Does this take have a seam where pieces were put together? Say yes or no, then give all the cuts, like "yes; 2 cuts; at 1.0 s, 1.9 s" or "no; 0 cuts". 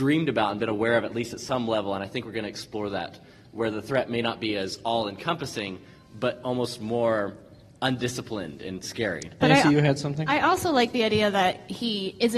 no; 0 cuts